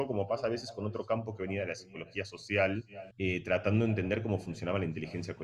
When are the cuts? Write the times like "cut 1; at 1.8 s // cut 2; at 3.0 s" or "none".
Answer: cut 1; at 3.1 s